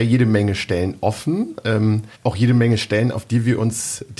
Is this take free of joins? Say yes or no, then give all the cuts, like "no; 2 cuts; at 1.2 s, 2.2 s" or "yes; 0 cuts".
no; 1 cut; at 2.1 s